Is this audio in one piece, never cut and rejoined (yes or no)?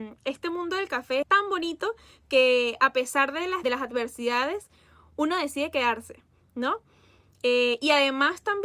no